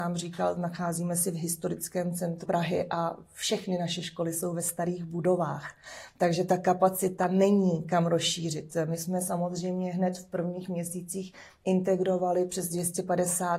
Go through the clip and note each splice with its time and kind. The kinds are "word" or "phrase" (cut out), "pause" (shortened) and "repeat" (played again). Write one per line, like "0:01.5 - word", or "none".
0:02.5 - word